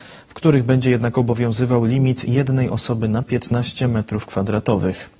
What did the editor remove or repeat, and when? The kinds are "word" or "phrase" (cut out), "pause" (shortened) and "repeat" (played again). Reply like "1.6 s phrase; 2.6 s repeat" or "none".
none